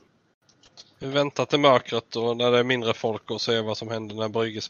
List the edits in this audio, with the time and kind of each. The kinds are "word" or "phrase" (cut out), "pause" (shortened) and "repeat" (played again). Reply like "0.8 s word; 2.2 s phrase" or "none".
none